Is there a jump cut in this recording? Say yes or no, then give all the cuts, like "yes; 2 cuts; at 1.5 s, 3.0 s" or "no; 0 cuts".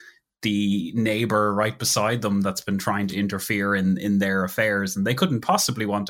no; 0 cuts